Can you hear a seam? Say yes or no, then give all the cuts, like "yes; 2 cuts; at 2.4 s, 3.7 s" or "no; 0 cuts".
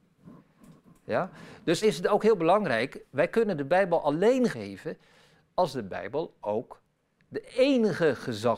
yes; 2 cuts; at 1.8 s, 4.5 s